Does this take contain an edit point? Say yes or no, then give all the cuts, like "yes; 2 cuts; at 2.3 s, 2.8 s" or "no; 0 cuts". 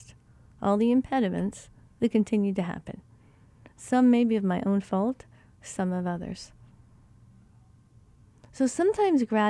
no; 0 cuts